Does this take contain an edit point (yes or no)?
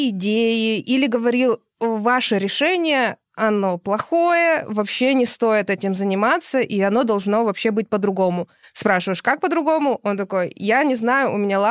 no